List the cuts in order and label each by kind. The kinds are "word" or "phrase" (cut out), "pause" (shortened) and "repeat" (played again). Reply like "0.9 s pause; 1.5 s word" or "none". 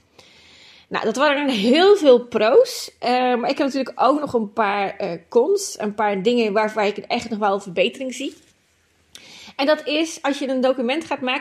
none